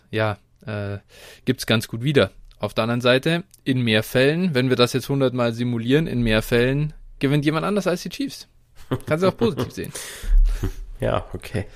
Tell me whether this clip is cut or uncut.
uncut